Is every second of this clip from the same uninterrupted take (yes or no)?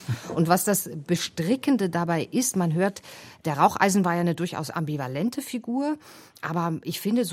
yes